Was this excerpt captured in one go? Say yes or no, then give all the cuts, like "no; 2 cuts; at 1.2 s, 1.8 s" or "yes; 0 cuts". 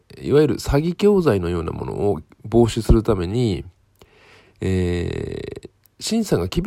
yes; 0 cuts